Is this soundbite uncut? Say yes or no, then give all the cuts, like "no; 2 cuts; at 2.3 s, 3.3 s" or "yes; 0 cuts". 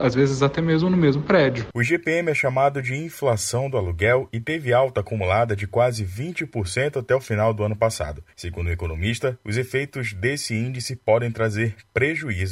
yes; 0 cuts